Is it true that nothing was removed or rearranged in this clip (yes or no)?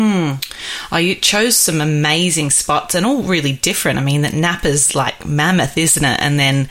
yes